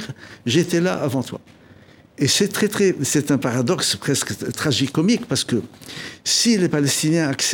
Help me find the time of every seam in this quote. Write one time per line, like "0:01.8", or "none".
none